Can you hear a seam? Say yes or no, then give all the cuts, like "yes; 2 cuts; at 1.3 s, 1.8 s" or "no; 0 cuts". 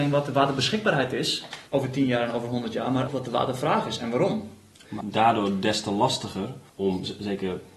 yes; 4 cuts; at 1.7 s, 3.1 s, 5.0 s, 6.7 s